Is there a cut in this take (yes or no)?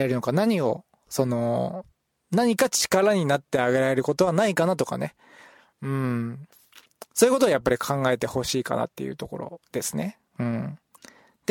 no